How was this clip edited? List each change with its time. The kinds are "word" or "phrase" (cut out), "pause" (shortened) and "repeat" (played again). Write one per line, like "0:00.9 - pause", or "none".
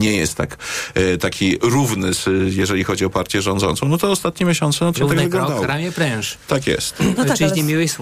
0:01.6 - word
0:05.0 - word